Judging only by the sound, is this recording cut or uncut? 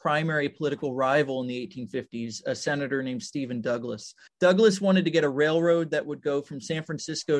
cut